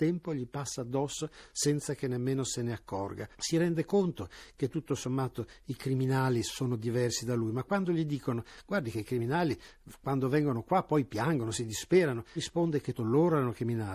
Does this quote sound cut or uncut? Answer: cut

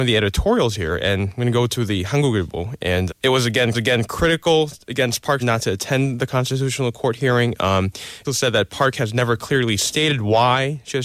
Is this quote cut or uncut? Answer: cut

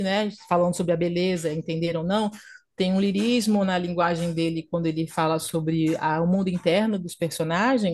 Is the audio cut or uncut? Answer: uncut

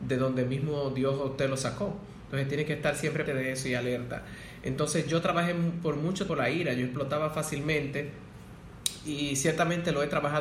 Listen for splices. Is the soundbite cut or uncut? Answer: cut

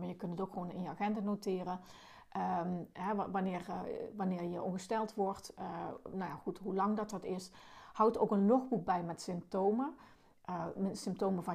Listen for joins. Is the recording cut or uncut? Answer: uncut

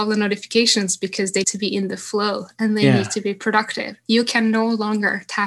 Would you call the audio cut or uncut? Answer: cut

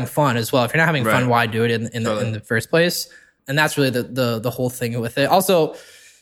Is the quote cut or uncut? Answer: cut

